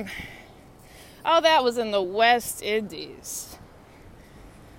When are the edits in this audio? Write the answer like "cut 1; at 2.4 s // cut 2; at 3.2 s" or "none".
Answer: none